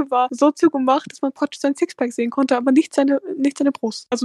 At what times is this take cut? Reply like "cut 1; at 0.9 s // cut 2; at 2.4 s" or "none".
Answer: none